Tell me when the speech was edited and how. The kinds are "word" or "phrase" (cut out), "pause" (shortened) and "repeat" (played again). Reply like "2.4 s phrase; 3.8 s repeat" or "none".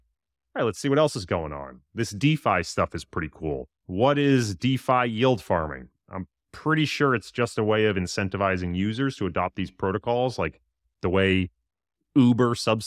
3.8 s pause